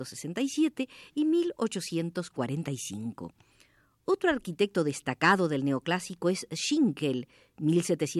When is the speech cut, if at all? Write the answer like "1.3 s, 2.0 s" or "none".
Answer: none